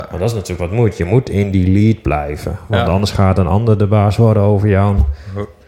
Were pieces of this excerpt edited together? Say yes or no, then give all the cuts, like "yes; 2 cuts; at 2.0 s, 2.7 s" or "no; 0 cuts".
no; 0 cuts